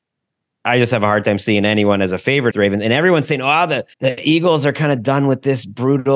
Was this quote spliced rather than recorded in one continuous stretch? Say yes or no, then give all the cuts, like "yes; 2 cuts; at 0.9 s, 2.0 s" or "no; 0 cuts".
yes; 2 cuts; at 2.5 s, 3.9 s